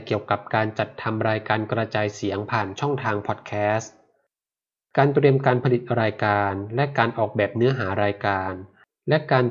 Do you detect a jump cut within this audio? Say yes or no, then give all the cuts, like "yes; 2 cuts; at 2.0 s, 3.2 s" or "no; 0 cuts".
no; 0 cuts